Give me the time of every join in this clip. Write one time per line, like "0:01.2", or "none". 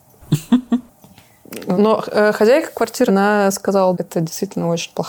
0:01.7
0:03.1
0:03.9

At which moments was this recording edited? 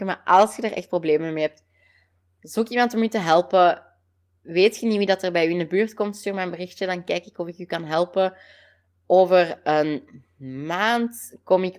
none

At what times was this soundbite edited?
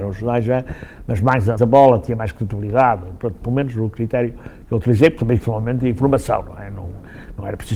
0:01.6
0:05.4

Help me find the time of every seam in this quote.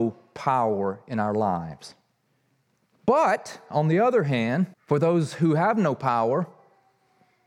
0:02.7
0:04.7

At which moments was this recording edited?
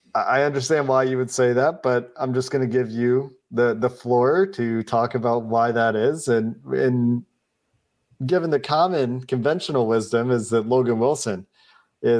none

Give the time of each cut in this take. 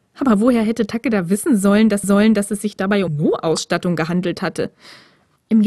0:02.0
0:03.1

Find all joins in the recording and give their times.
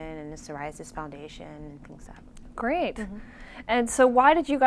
0:02.1

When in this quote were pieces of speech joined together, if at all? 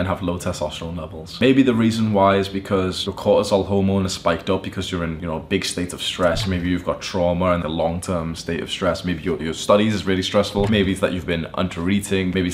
0:07.6
0:09.4

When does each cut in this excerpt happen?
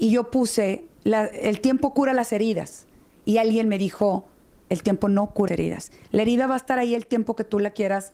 0:05.5

